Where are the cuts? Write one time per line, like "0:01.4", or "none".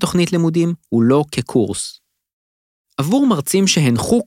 none